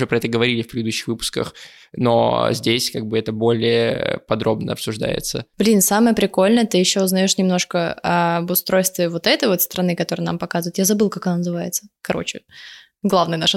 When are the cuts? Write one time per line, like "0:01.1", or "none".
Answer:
none